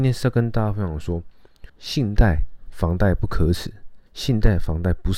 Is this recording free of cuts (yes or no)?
no